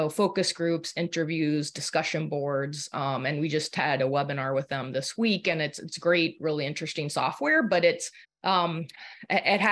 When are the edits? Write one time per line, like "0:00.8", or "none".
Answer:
0:08.2